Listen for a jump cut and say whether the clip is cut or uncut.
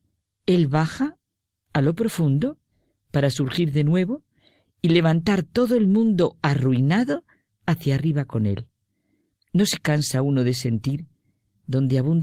uncut